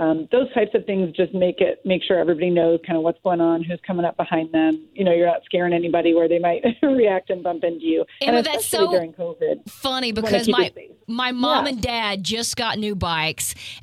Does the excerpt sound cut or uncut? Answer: uncut